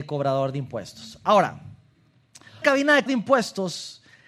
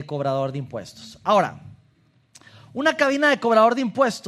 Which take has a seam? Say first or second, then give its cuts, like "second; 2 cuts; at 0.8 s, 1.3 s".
first; 2 cuts; at 2.6 s, 3.1 s